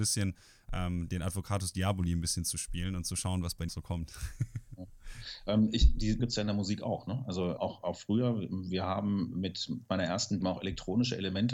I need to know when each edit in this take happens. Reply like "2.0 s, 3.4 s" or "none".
3.7 s, 6.2 s, 7.6 s, 10.4 s